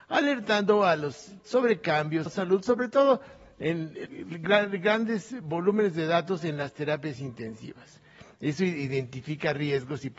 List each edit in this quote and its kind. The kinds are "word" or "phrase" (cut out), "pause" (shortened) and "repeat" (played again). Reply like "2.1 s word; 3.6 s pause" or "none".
1.4 s word; 2.3 s phrase; 4.1 s word